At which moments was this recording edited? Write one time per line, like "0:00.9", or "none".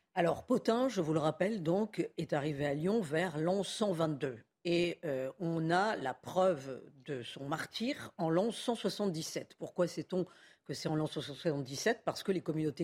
none

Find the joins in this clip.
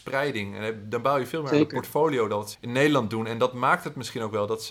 0:02.5

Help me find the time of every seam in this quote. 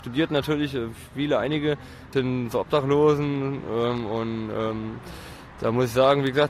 0:02.1

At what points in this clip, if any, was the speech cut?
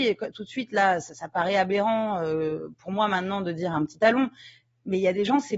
none

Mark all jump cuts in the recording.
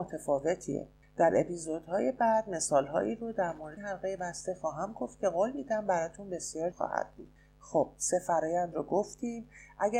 0:03.8
0:06.7

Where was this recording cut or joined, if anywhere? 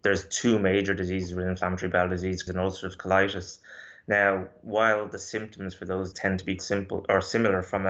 0:02.5
0:06.1
0:06.6

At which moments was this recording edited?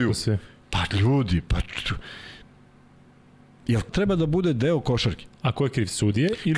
0:03.9

